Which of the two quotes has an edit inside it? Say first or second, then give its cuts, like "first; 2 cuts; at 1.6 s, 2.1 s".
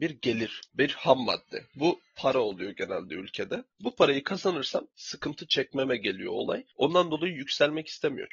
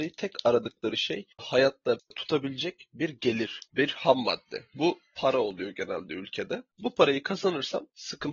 second; 1 cut; at 1.4 s